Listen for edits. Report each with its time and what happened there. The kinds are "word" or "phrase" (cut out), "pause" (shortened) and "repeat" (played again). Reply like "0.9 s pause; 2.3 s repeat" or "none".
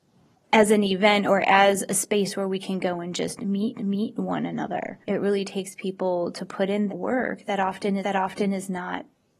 3.7 s repeat; 5.0 s pause; 6.9 s word; 8.0 s repeat